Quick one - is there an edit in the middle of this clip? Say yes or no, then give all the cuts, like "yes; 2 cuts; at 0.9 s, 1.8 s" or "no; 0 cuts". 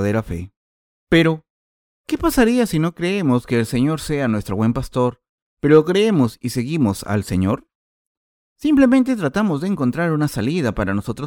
no; 0 cuts